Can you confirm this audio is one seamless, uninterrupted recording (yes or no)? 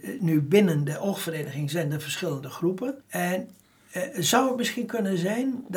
no